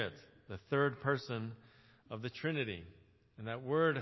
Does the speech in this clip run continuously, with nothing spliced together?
yes; 0 cuts

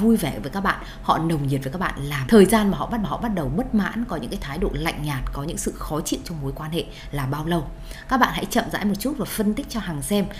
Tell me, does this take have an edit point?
yes; 2 cuts; at 2.3 s, 3.0 s

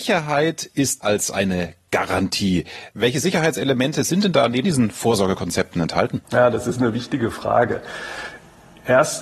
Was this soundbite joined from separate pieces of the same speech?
yes; 3 cuts; at 1.0 s, 4.6 s, 6.2 s

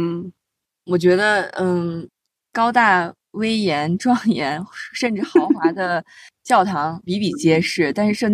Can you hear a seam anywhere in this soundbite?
no; 0 cuts

